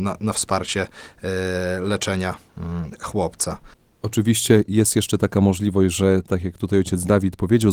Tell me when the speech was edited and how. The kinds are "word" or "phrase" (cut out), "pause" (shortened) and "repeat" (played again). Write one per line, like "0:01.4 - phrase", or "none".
0:03.7 - pause